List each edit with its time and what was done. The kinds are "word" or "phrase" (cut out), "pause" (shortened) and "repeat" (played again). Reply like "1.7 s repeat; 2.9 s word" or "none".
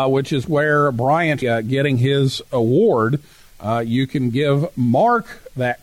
1.4 s phrase

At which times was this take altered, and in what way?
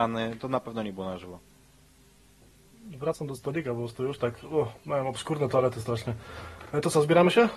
none

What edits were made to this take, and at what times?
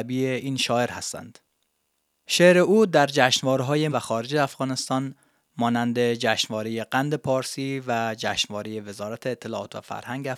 3.9 s phrase

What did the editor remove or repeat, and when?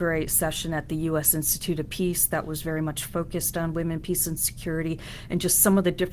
none

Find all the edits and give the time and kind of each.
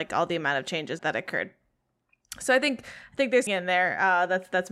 1.0 s word; 3.5 s word

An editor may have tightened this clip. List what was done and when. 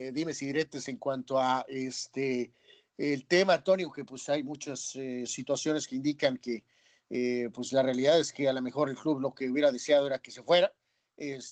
none

